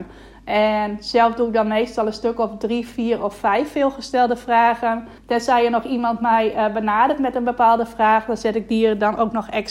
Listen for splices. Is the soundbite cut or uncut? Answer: cut